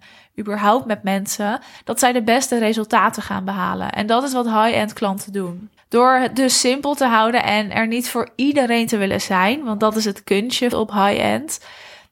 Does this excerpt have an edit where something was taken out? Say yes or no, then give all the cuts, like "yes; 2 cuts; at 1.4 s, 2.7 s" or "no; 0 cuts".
yes; 2 cuts; at 5.8 s, 10.7 s